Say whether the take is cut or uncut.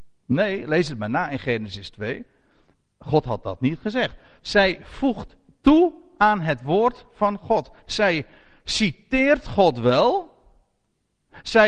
uncut